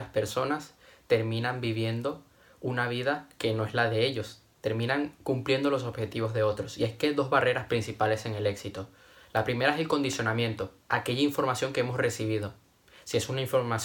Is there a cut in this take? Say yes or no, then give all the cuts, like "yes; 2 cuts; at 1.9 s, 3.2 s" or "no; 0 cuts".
yes; 1 cut; at 10.8 s